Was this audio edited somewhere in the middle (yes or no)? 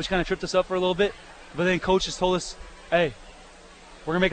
no